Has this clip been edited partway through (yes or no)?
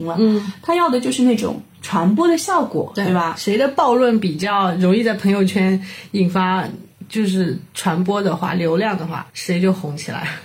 yes